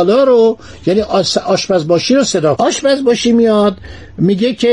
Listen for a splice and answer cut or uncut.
cut